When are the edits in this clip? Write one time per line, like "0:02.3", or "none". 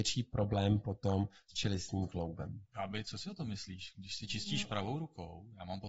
0:02.7